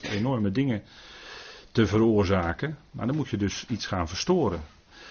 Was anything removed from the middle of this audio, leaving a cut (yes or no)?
no